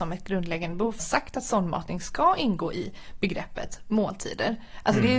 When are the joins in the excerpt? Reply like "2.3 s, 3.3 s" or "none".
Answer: 1.0 s